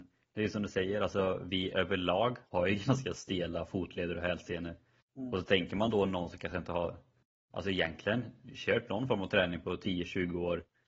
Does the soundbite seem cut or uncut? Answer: cut